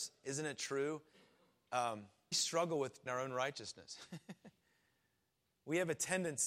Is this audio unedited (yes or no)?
no